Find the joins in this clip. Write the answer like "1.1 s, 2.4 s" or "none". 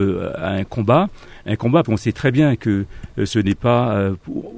1.8 s